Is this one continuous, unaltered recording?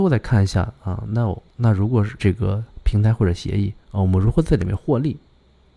no; 3 cuts; at 1.5 s, 2.2 s, 3.8 s

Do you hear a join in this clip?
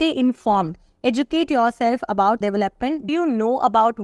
yes; 2 cuts; at 2.4 s, 3.1 s

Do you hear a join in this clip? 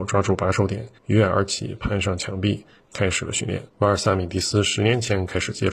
yes; 2 cuts; at 1.0 s, 3.7 s

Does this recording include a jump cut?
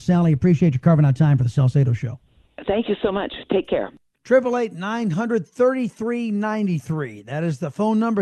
no; 0 cuts

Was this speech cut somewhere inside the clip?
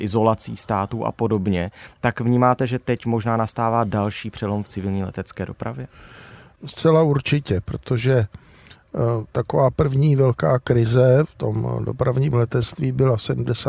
no; 0 cuts

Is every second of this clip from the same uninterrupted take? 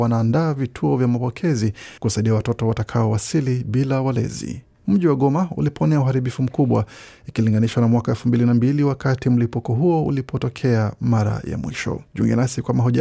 no; 2 cuts; at 2.0 s, 12.1 s

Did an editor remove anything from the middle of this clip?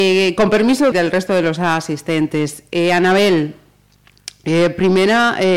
yes; 1 cut; at 0.9 s

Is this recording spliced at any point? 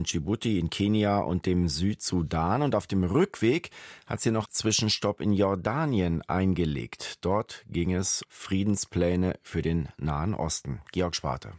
yes; 2 cuts; at 4.4 s, 8.2 s

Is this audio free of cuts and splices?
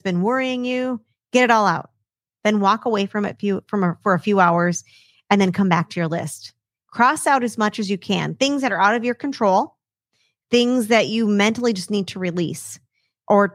yes; 0 cuts

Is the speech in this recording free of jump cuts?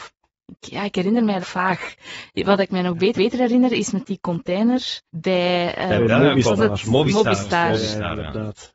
no; 3 cuts; at 1.4 s, 3.2 s, 5.1 s

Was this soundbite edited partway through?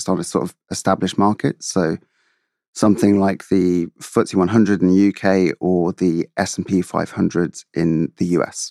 no; 0 cuts

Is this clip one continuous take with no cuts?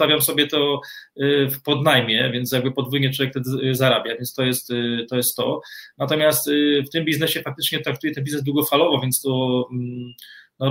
yes; 0 cuts

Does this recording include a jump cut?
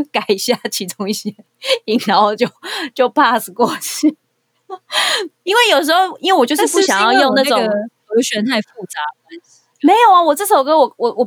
no; 0 cuts

